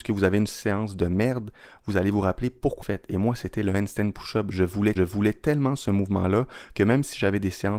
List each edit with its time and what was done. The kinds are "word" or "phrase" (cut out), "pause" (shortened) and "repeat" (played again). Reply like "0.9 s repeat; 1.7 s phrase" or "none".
2.8 s phrase; 5.0 s repeat